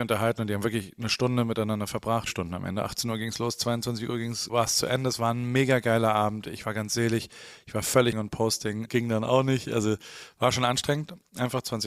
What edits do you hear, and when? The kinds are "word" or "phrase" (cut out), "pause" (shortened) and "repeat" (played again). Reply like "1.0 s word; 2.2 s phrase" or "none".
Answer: 2.3 s phrase; 4.5 s word; 8.1 s phrase; 8.9 s word